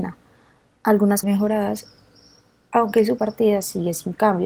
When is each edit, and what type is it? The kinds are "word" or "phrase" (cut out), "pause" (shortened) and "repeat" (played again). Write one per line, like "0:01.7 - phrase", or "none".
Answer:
0:01.2 - word
0:03.2 - phrase